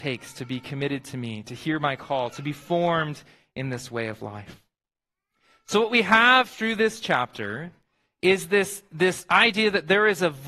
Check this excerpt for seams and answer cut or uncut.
uncut